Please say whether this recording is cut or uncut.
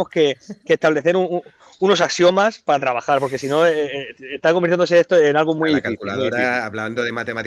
uncut